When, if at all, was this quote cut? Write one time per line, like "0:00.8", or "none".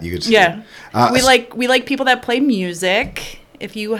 none